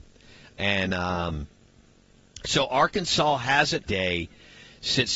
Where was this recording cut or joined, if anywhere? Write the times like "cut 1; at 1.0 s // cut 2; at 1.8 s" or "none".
cut 1; at 3.9 s